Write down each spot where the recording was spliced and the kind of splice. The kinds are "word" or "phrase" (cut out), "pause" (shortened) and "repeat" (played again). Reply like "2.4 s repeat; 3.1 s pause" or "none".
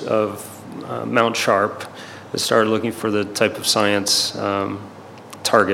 none